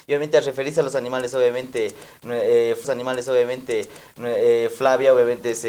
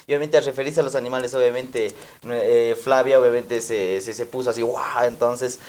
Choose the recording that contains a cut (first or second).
first